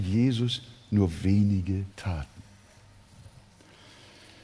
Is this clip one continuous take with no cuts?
no; 1 cut; at 1.9 s

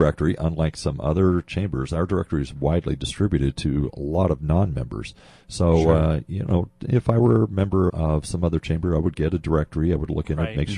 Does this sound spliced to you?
yes; 1 cut; at 7.9 s

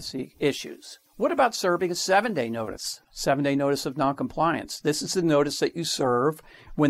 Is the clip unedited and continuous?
no; 1 cut; at 1.1 s

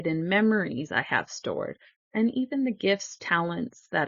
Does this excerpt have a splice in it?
no; 0 cuts

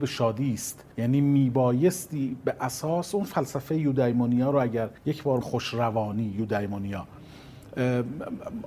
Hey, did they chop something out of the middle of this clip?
yes; 3 cuts; at 0.9 s, 5.0 s, 5.4 s

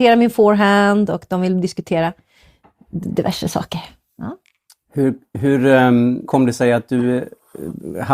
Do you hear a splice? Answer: yes; 1 cut; at 6.3 s

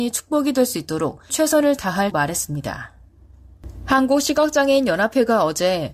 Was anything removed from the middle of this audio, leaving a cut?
yes; 2 cuts; at 1.3 s, 2.1 s

